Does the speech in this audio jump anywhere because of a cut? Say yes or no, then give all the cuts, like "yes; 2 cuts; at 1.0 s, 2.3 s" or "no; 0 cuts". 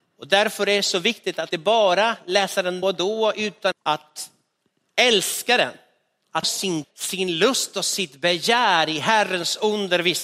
yes; 5 cuts; at 1.5 s, 2.8 s, 3.7 s, 6.4 s, 6.8 s